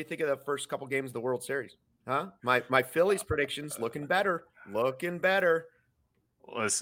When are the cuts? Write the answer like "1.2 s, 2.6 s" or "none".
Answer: none